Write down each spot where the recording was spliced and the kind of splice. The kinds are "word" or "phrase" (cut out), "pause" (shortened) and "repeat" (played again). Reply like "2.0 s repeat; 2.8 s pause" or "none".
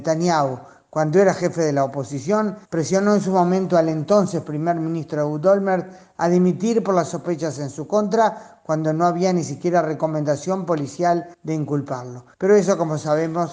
2.6 s pause; 11.3 s pause; 12.3 s pause